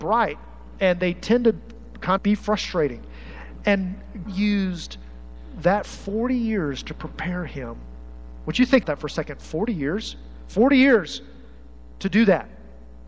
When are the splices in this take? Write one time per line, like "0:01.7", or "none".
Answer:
0:02.2
0:04.3
0:08.8